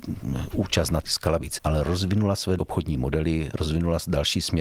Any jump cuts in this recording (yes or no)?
yes